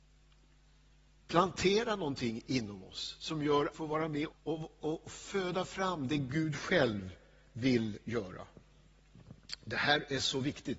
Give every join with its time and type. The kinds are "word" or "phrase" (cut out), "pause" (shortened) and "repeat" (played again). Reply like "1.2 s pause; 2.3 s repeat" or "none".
3.7 s phrase; 4.3 s word